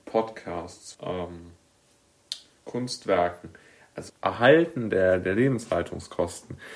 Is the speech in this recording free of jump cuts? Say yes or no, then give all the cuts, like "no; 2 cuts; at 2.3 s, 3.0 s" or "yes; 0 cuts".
no; 2 cuts; at 0.9 s, 4.1 s